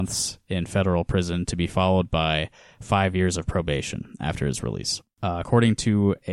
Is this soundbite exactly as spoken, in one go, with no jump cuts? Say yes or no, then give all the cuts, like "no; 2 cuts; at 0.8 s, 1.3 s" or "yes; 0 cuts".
yes; 0 cuts